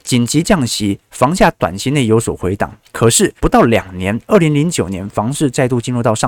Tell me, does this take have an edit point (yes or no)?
yes